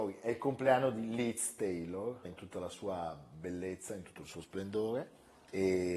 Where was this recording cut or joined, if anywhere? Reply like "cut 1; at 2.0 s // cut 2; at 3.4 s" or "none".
cut 1; at 2.2 s